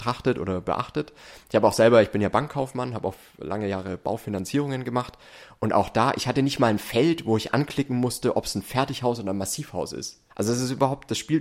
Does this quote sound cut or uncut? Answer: cut